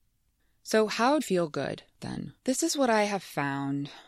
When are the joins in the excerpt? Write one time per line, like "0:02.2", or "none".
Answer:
0:01.2
0:02.4